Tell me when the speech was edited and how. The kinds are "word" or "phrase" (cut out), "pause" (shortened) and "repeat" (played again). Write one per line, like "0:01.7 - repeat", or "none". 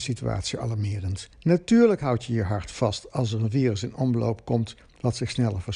0:01.3 - pause